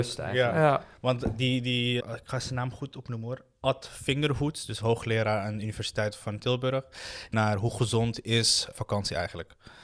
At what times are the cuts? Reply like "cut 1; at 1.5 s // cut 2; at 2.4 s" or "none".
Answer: cut 1; at 2.0 s // cut 2; at 7.3 s // cut 3; at 8.7 s